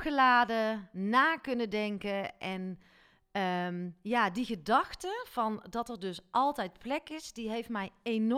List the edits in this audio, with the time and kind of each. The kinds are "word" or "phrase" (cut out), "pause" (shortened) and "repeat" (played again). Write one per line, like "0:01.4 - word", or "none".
none